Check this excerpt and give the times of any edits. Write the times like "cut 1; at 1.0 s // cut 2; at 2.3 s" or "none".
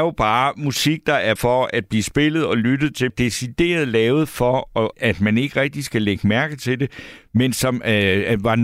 cut 1; at 1.4 s // cut 2; at 3.1 s // cut 3; at 4.9 s